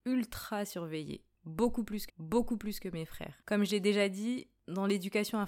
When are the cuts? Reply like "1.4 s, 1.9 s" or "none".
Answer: 2.1 s